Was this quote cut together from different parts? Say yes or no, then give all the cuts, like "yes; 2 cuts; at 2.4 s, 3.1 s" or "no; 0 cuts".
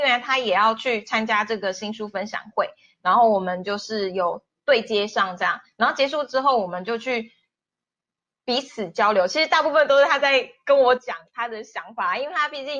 no; 0 cuts